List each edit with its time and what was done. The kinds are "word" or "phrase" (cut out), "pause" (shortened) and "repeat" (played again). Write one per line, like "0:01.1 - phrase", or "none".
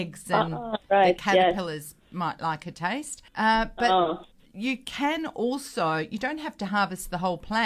0:03.3 - pause